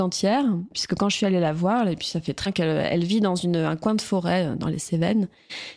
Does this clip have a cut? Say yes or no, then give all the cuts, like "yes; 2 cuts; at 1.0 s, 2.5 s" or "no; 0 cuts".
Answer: yes; 1 cut; at 2.5 s